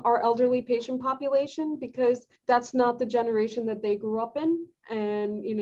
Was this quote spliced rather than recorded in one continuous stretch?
yes; 1 cut; at 2.4 s

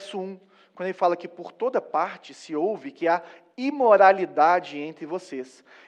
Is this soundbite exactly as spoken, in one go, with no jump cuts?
yes; 0 cuts

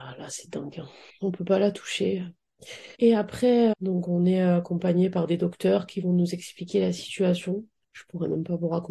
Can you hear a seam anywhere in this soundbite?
yes; 3 cuts; at 1.1 s, 2.9 s, 3.7 s

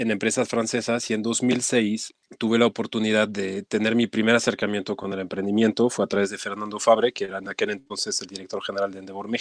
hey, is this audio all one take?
no; 1 cut; at 2.2 s

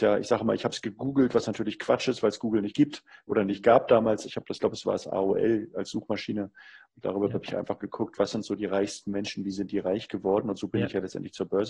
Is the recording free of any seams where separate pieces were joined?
yes; 0 cuts

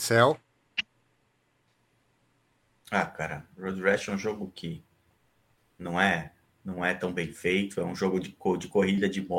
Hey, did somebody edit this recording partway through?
no; 0 cuts

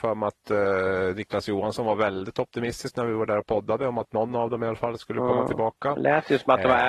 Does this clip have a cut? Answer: no; 0 cuts

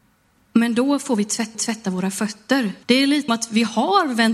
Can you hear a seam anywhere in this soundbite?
yes; 3 cuts; at 1.5 s, 2.8 s, 3.3 s

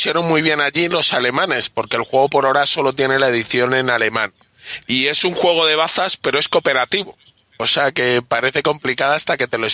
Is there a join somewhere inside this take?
no; 0 cuts

